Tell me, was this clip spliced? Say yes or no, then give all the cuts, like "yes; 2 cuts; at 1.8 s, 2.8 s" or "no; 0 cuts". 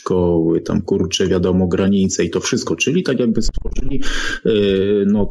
no; 0 cuts